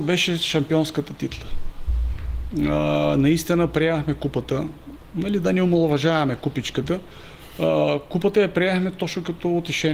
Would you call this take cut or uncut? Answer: uncut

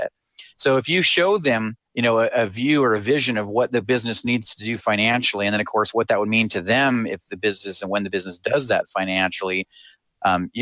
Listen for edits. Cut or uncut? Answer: cut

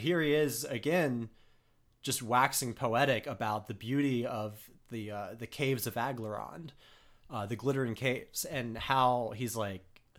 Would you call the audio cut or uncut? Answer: uncut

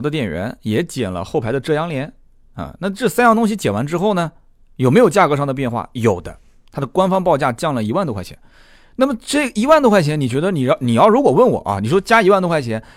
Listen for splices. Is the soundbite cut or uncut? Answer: uncut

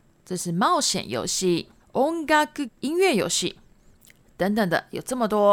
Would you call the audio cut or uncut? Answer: cut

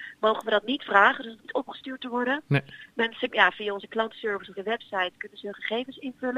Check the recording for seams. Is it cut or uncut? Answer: cut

